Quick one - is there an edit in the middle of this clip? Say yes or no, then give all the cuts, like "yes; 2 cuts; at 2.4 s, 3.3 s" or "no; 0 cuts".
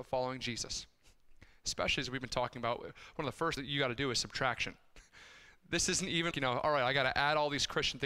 yes; 2 cuts; at 3.6 s, 6.3 s